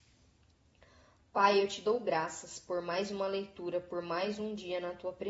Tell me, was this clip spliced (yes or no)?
no